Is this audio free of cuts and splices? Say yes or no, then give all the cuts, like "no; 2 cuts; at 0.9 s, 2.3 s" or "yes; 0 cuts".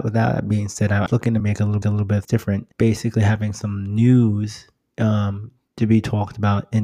no; 6 cuts; at 1.1 s, 1.4 s, 1.8 s, 2.2 s, 2.7 s, 5.7 s